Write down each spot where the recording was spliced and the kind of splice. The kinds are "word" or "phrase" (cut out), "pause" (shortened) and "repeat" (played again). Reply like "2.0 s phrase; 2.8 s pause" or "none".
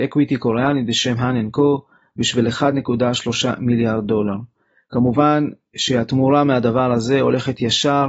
none